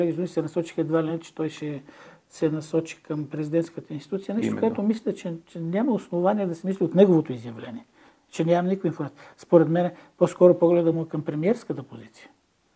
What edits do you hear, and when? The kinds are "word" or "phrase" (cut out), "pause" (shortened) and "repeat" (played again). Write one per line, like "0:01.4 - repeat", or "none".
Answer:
none